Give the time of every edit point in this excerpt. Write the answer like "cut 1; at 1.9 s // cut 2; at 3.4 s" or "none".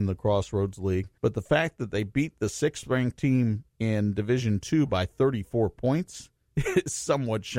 cut 1; at 1.2 s // cut 2; at 3.7 s